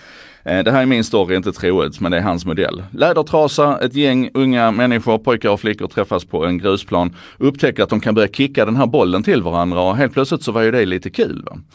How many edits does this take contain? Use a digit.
0